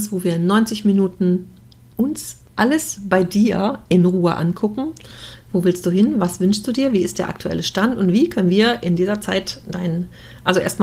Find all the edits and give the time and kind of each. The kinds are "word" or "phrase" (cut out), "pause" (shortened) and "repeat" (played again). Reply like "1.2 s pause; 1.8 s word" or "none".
none